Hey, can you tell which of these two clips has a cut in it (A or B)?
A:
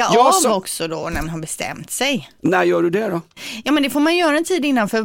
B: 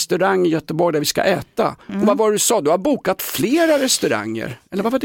A